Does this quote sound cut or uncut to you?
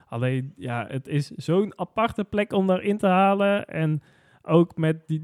uncut